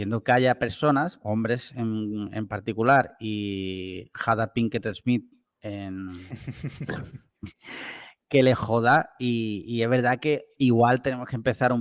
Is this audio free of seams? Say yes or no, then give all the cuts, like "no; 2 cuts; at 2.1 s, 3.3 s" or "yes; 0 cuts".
yes; 0 cuts